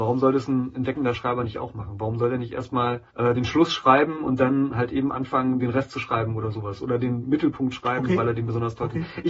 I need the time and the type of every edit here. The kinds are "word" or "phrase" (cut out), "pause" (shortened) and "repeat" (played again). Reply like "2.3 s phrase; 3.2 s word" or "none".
3.1 s pause